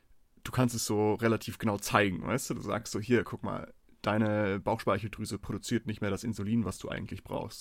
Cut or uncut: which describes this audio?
uncut